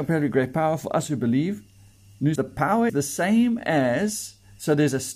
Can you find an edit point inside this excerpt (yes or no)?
yes